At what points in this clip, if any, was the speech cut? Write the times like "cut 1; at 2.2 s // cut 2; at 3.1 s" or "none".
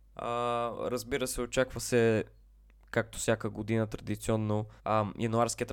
cut 1; at 2.4 s // cut 2; at 4.8 s